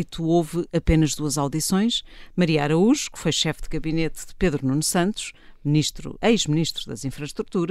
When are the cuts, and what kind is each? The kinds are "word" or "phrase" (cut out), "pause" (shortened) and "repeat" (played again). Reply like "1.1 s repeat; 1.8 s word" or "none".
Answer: 6.2 s word